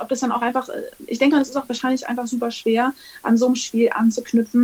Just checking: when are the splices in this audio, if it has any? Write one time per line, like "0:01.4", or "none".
none